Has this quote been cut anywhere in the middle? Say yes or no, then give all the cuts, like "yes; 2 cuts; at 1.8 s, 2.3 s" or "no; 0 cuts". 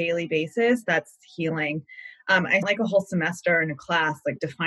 yes; 1 cut; at 2.6 s